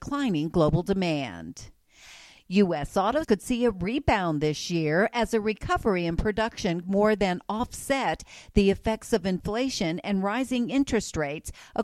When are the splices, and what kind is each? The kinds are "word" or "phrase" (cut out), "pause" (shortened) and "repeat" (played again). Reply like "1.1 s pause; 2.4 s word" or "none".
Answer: 3.2 s word; 6.8 s word